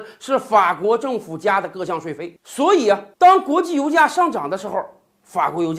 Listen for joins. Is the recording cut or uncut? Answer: cut